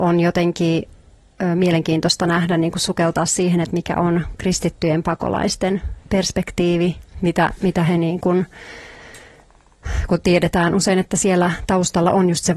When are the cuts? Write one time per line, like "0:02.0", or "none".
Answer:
none